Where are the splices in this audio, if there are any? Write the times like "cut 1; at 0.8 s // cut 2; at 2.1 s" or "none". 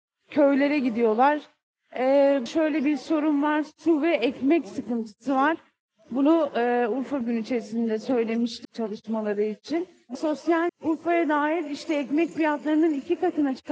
cut 1; at 2.5 s // cut 2; at 7.2 s // cut 3; at 8.6 s // cut 4; at 10.1 s // cut 5; at 10.7 s